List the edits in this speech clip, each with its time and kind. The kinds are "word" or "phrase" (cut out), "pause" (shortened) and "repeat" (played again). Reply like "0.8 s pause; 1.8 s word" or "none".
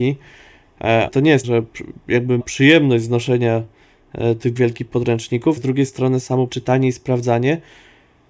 1.1 s word; 1.4 s word; 2.4 s word; 4.6 s word; 5.6 s word; 6.5 s word

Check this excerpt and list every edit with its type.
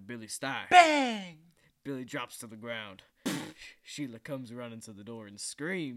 none

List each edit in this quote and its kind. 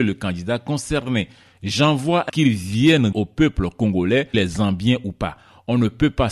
2.3 s phrase; 3.1 s word; 4.3 s word

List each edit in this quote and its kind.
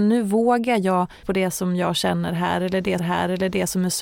1.2 s word; 3.0 s repeat

